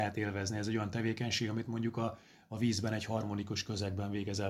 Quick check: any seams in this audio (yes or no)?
no